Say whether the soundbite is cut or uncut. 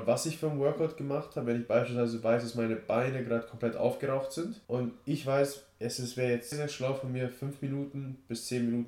cut